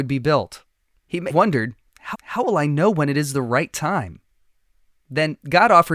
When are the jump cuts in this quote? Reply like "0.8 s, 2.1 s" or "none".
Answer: 1.3 s, 2.1 s